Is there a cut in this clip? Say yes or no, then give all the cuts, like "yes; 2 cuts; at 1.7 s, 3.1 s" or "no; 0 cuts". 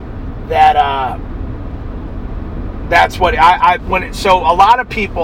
no; 0 cuts